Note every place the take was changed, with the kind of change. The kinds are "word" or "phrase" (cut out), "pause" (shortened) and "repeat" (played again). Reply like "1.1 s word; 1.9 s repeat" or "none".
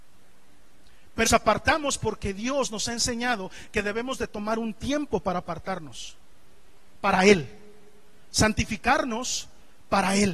1.3 s word

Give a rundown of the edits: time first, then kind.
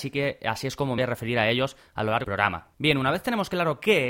1.0 s phrase; 2.2 s word

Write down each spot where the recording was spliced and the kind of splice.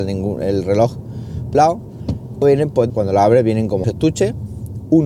1.5 s word; 2.4 s word; 2.9 s phrase; 3.8 s word

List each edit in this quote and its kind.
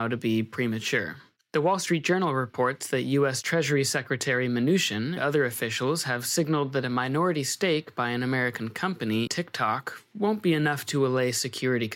1.4 s pause; 5.2 s word; 9.3 s word

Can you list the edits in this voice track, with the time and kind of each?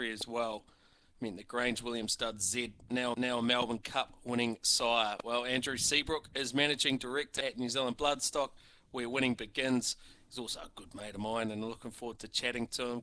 3.1 s repeat

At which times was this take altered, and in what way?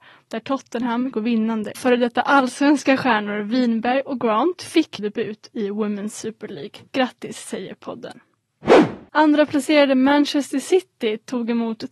1.1 s word; 1.7 s phrase; 5.0 s word; 6.9 s pause

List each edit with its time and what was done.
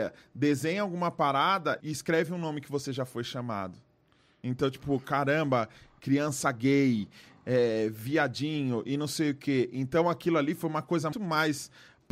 1.8 s word; 11.1 s word

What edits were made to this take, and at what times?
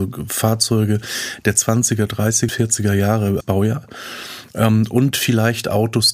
2.5 s word; 3.4 s word

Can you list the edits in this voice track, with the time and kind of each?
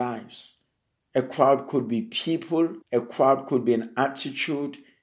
2.8 s pause

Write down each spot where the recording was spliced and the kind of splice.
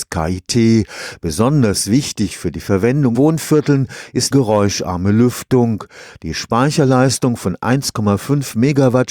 3.1 s word; 4.3 s word

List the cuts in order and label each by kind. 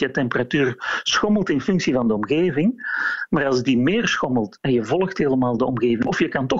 none

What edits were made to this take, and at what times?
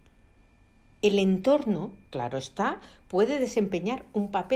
2.0 s pause

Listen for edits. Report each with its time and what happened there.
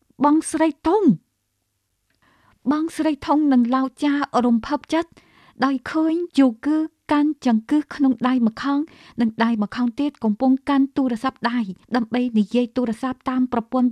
6.3 s pause; 11.8 s pause

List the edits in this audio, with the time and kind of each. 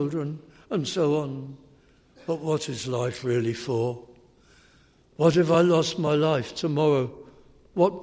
none

